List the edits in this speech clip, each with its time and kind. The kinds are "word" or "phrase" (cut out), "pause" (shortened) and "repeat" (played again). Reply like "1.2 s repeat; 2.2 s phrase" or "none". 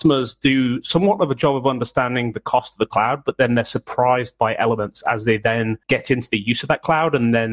5.8 s pause